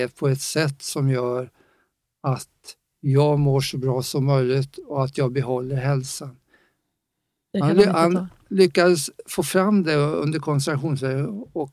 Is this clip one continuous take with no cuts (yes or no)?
yes